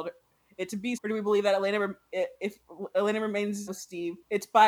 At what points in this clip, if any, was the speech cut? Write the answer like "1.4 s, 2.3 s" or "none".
1.0 s, 3.7 s